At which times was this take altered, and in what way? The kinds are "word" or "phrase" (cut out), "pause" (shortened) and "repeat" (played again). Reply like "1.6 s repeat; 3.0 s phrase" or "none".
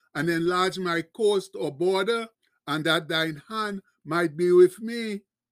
2.3 s pause